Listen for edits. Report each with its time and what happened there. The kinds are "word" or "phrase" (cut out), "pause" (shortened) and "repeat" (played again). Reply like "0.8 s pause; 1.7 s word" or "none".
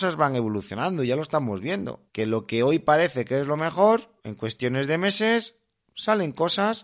2.1 s pause; 4.2 s pause